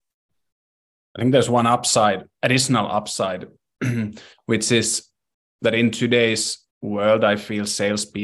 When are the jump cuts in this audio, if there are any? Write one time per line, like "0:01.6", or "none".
0:06.7